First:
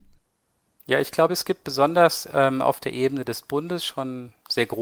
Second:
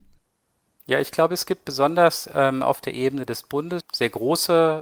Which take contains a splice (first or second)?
second